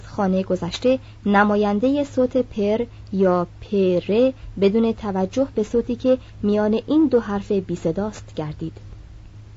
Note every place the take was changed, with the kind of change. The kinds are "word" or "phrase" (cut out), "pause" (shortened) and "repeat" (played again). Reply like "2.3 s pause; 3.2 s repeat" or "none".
none